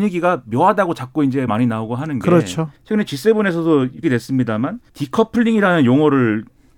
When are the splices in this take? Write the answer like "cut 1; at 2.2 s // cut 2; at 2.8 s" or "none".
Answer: cut 1; at 1.5 s // cut 2; at 2.8 s // cut 3; at 4.0 s // cut 4; at 4.9 s